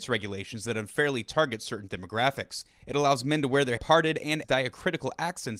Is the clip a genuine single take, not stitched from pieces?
no; 2 cuts; at 3.8 s, 4.4 s

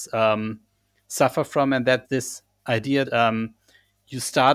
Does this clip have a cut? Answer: yes; 2 cuts; at 2.0 s, 3.1 s

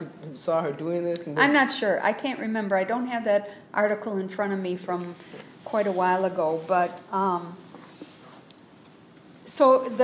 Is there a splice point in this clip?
no; 0 cuts

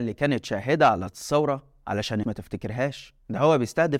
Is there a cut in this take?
yes; 2 cuts; at 1.1 s, 2.2 s

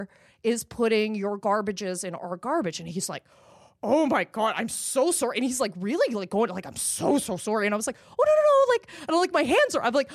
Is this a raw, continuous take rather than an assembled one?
yes; 0 cuts

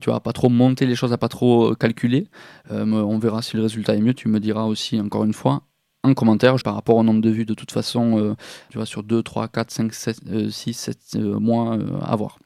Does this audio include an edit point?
yes; 2 cuts; at 6.6 s, 8.7 s

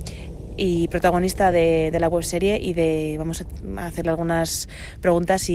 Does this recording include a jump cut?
no; 0 cuts

